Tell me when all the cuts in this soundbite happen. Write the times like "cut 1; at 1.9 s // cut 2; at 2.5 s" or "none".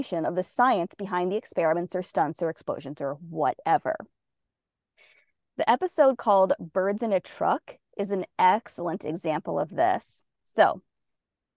none